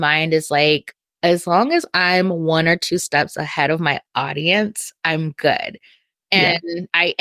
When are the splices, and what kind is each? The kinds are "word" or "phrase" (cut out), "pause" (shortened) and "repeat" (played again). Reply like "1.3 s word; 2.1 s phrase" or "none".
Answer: none